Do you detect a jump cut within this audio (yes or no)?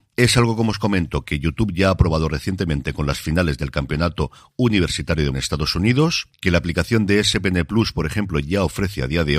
yes